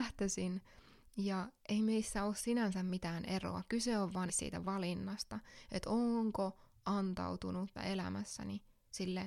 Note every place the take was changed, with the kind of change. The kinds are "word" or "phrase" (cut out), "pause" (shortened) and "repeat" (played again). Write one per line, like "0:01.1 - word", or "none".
0:04.3 - word
0:07.8 - word